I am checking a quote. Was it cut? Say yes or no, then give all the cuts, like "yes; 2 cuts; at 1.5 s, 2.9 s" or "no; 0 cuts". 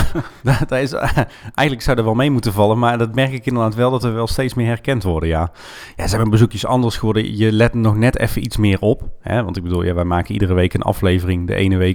no; 0 cuts